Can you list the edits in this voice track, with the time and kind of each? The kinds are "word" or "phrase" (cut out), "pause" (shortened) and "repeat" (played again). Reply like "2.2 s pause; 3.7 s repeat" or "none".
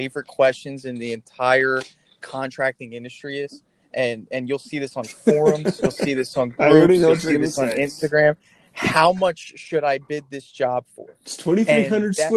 none